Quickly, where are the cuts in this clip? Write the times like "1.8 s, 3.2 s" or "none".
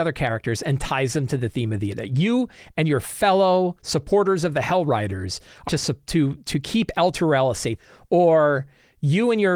1.9 s, 5.7 s